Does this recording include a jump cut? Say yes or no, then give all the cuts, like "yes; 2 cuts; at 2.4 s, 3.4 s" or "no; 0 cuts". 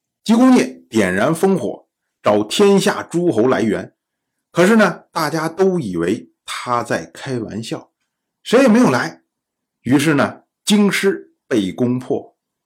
no; 0 cuts